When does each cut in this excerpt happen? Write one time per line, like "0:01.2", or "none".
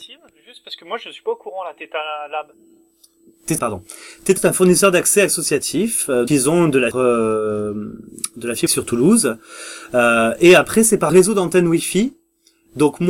0:03.6
0:04.4
0:06.3
0:06.9
0:08.7
0:11.1